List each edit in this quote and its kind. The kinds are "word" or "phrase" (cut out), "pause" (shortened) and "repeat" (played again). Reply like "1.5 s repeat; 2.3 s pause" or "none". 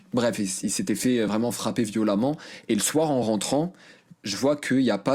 none